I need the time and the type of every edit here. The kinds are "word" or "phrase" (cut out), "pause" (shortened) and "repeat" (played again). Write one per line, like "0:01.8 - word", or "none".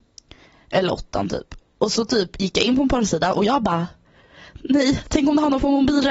0:01.7 - pause